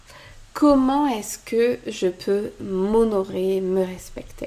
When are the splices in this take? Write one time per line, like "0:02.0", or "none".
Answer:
none